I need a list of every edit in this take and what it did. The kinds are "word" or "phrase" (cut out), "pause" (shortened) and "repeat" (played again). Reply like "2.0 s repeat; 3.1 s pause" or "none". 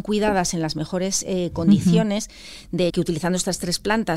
2.9 s phrase